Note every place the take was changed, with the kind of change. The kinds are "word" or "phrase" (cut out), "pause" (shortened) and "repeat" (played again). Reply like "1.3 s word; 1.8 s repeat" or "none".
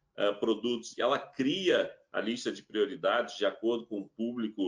0.9 s word